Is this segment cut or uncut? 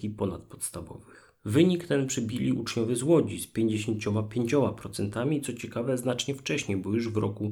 cut